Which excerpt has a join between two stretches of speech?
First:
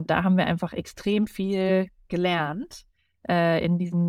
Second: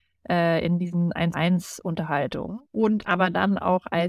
second; 2 cuts; at 1.3 s, 2.7 s

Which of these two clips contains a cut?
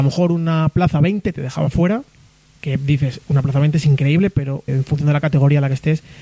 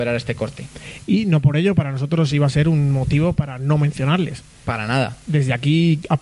first; 1 cut; at 4.7 s

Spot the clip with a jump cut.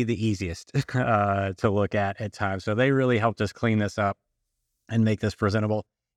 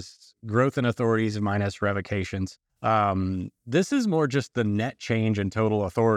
second; 1 cut; at 2.7 s

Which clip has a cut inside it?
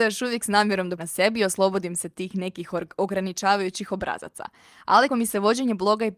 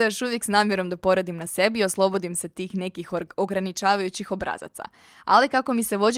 first; 2 cuts; at 1.0 s, 5.1 s

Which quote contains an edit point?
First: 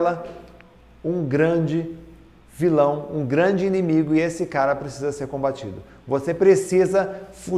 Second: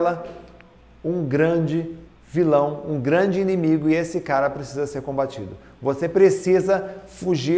second; 1 cut; at 2.1 s

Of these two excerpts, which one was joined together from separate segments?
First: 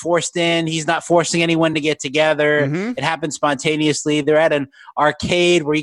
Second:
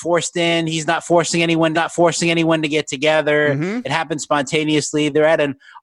second; 1 cut; at 1.7 s

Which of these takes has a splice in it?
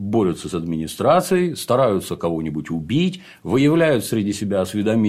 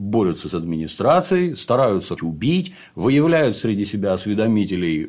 second; 1 cut; at 2.2 s

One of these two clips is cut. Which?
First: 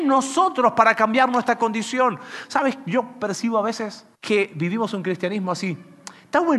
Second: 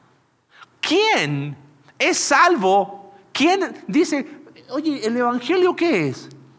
first; 1 cut; at 4.1 s

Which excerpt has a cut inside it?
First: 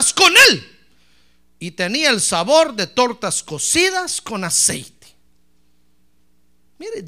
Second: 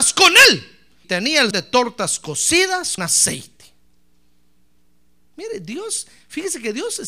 second; 3 cuts; at 1.0 s, 1.5 s, 3.0 s

